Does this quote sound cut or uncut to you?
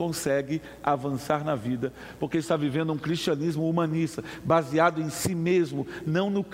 uncut